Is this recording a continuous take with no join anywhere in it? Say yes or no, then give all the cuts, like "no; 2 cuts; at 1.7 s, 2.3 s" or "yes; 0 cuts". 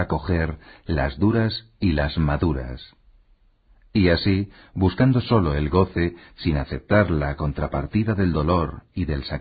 yes; 0 cuts